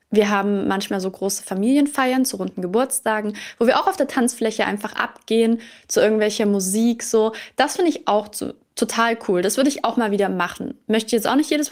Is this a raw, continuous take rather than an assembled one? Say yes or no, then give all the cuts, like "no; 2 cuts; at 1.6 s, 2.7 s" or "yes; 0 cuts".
yes; 0 cuts